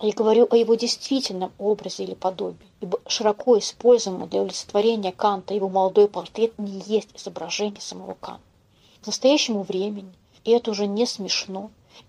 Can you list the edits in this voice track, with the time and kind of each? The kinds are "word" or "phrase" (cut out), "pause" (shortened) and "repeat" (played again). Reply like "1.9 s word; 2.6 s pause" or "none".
none